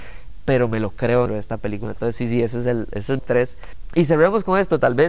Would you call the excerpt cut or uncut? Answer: cut